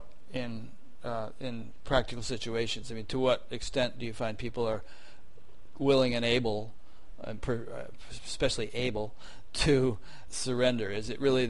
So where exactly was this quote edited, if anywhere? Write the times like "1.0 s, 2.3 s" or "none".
10.3 s